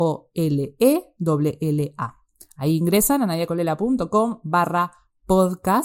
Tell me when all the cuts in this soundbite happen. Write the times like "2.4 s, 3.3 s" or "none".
none